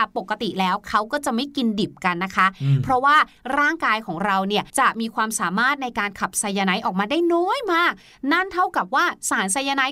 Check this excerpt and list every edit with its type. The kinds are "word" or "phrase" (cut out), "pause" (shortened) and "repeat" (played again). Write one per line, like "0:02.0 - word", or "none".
0:04.7 - pause